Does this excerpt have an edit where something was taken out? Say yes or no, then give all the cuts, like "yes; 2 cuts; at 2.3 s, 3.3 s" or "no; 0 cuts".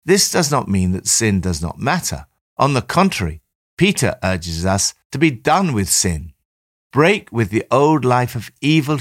no; 0 cuts